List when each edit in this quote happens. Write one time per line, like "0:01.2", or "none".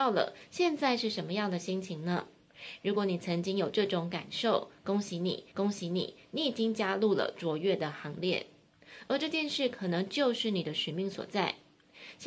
0:05.5